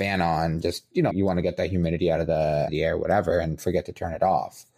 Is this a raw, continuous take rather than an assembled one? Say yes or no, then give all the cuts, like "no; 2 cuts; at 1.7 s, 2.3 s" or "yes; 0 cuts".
no; 2 cuts; at 1.1 s, 2.7 s